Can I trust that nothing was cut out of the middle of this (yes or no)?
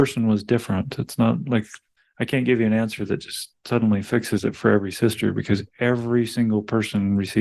no